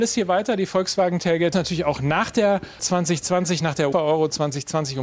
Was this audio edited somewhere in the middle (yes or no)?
yes